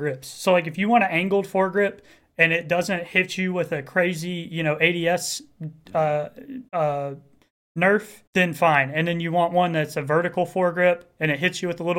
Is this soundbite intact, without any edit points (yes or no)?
no